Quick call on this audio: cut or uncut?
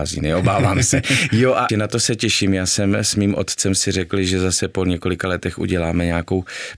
cut